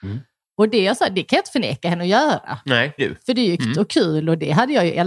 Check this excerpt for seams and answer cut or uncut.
cut